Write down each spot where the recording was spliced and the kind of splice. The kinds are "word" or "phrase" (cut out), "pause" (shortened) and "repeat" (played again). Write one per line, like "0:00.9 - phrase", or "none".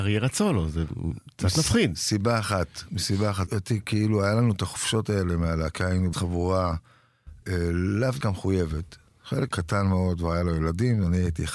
0:03.5 - word
0:06.1 - word
0:07.4 - word
0:08.2 - word
0:09.5 - word